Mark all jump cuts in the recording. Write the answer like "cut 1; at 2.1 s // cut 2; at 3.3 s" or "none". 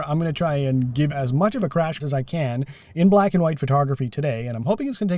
cut 1; at 1.1 s // cut 2; at 2.0 s